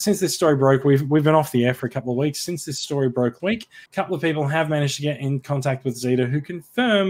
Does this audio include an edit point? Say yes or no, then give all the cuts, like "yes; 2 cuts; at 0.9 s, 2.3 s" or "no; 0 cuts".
yes; 2 cuts; at 3.4 s, 3.9 s